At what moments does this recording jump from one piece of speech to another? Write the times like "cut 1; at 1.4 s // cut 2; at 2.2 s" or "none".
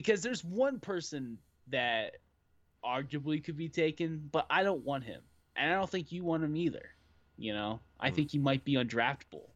none